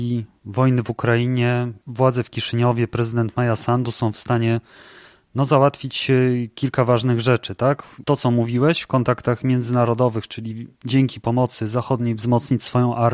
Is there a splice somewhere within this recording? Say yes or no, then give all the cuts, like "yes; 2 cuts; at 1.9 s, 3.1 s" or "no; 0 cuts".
no; 0 cuts